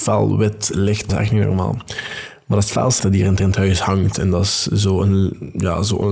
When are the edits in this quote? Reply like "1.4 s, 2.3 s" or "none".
1.1 s, 3.0 s, 3.4 s